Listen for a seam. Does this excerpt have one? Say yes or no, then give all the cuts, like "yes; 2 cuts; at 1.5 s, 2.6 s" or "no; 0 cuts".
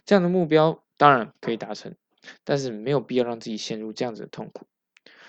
yes; 1 cut; at 0.9 s